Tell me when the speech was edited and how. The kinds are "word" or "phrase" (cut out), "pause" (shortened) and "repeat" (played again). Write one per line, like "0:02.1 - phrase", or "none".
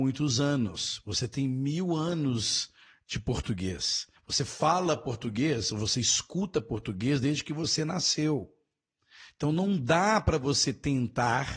0:04.2 - pause